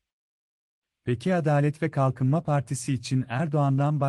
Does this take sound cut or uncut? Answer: uncut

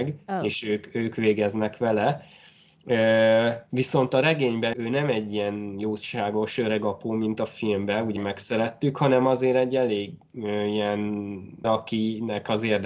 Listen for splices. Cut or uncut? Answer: cut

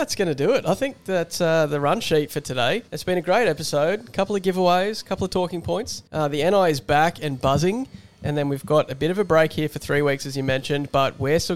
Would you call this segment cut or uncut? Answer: cut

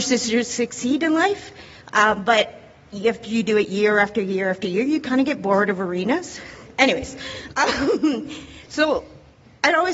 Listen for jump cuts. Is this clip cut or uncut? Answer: uncut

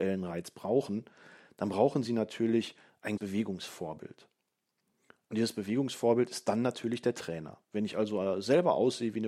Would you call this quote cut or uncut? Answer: cut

